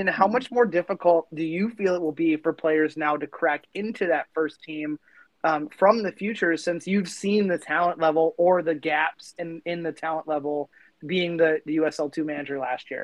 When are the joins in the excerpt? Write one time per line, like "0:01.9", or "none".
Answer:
none